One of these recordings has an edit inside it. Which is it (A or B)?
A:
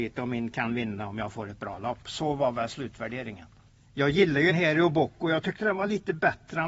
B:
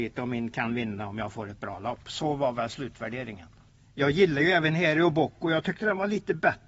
A